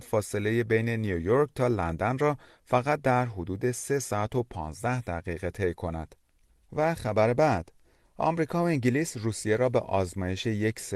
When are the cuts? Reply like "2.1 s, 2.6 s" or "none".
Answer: none